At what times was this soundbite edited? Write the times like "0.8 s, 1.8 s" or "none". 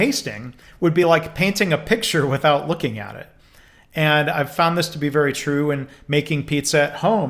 none